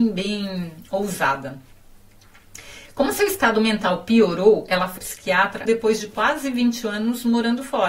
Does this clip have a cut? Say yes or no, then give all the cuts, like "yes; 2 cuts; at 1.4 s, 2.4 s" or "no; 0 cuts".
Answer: yes; 2 cuts; at 5.0 s, 5.7 s